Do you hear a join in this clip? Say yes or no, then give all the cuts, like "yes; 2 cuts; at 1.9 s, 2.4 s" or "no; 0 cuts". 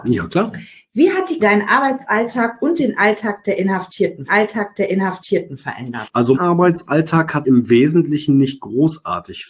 yes; 4 cuts; at 1.4 s, 4.3 s, 6.3 s, 7.4 s